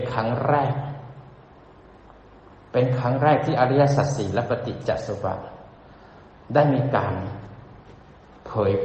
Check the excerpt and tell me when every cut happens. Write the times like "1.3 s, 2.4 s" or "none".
none